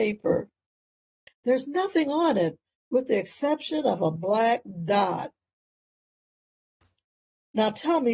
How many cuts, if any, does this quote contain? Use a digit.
0